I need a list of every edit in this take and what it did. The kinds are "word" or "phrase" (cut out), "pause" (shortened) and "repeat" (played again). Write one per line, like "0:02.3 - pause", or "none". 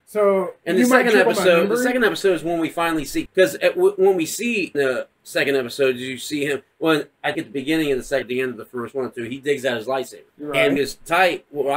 0:03.3 - word
0:04.7 - word
0:07.3 - word
0:08.2 - word
0:10.3 - pause
0:10.8 - phrase